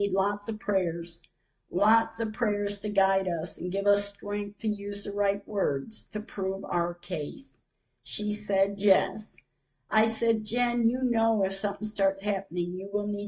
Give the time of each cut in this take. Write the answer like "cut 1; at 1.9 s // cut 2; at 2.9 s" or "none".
none